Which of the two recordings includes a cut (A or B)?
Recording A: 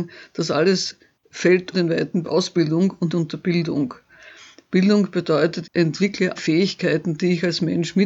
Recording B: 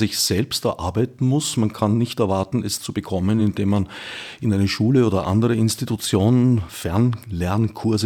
A